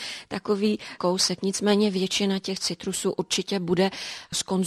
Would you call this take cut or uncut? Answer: cut